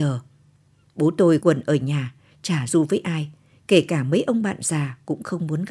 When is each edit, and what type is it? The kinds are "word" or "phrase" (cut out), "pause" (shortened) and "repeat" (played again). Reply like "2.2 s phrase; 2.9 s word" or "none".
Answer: 1.4 s word; 2.7 s word